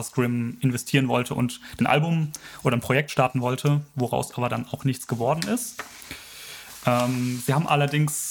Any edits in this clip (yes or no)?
yes